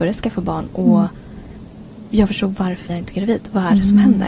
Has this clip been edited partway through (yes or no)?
yes